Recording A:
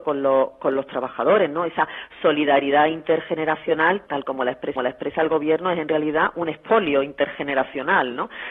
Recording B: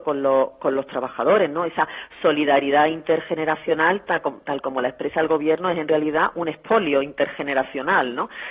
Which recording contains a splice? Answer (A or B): A